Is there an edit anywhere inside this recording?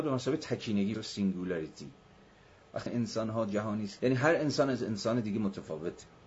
yes; 3 cuts; at 0.9 s, 2.9 s, 4.0 s

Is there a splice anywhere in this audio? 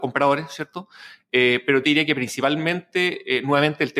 yes; 1 cut; at 1.8 s

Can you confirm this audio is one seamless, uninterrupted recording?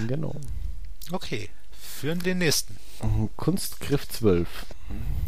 no; 1 cut; at 2.2 s

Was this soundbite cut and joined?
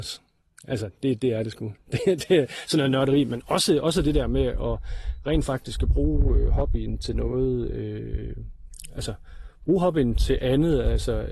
no; 0 cuts

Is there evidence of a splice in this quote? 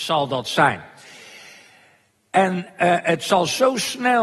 no; 0 cuts

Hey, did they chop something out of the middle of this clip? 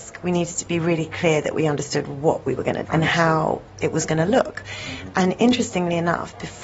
yes; 1 cut; at 2.8 s

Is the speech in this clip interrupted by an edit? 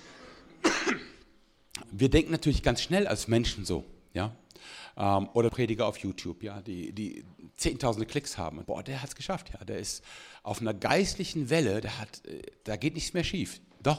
yes; 3 cuts; at 1.8 s, 5.5 s, 8.6 s

